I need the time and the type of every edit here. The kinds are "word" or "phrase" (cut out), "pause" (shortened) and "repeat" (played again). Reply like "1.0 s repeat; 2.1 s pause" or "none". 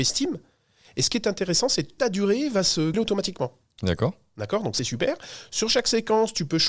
2.0 s word; 2.9 s word; 4.8 s word